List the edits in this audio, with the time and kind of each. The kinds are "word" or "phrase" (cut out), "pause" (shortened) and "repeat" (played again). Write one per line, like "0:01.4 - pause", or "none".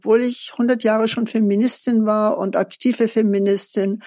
none